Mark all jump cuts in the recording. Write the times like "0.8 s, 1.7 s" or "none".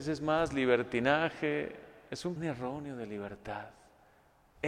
2.4 s